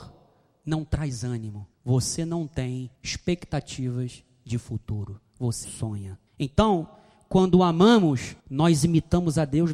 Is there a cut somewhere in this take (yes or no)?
yes